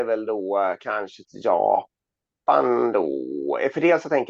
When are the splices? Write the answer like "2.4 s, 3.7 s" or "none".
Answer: 1.2 s